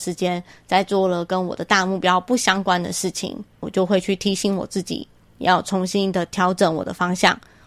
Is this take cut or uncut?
uncut